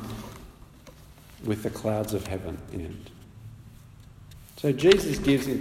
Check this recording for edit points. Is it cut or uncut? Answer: cut